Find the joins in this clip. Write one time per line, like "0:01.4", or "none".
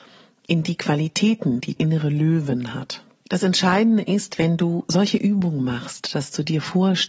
0:01.8